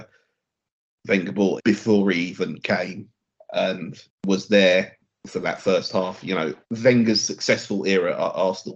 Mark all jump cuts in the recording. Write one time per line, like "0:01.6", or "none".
0:01.6
0:05.1
0:06.6

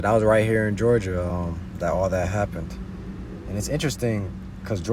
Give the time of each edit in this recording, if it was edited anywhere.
none

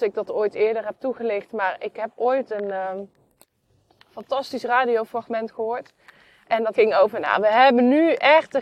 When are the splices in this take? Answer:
0:06.7

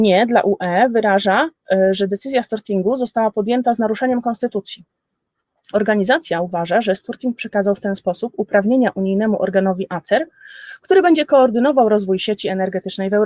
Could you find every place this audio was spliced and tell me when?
none

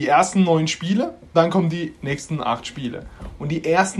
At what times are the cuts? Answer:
0:01.3

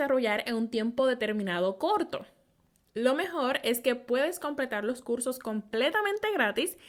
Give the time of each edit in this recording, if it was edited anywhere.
none

